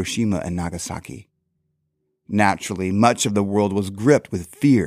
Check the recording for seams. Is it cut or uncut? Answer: uncut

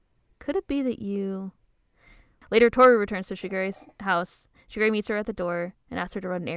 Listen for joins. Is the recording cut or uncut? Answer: uncut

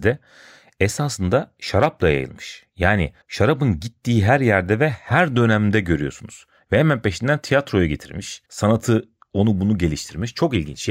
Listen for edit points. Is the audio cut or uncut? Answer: cut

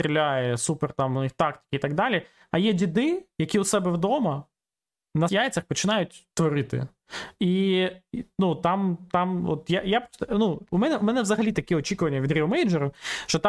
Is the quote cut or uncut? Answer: cut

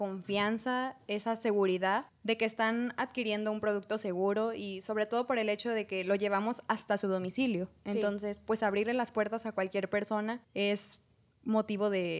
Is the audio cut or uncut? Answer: cut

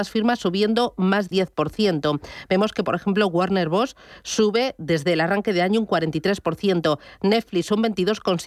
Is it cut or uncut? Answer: cut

